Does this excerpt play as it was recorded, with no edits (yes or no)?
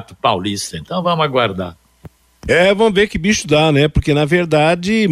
yes